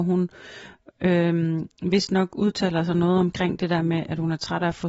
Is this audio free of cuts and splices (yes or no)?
yes